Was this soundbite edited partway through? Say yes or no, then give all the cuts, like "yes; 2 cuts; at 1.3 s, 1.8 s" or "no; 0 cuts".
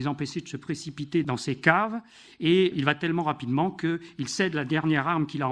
no; 0 cuts